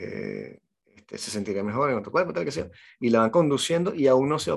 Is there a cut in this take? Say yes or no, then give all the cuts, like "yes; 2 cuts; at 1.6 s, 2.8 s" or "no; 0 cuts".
no; 0 cuts